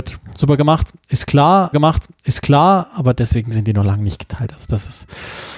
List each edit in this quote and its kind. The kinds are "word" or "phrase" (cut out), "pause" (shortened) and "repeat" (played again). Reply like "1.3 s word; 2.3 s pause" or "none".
1.7 s repeat